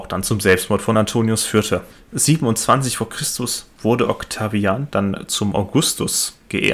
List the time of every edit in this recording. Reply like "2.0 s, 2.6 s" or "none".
none